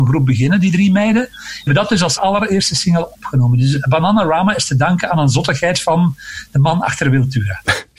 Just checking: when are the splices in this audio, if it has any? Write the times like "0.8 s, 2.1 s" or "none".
1.7 s, 2.2 s